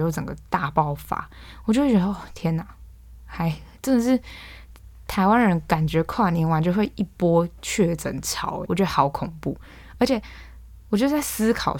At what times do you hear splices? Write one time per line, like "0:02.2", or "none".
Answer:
0:08.7